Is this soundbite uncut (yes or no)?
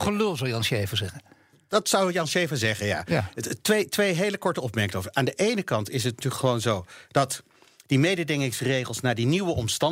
yes